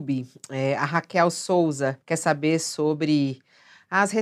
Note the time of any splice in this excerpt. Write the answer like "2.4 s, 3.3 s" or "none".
2.0 s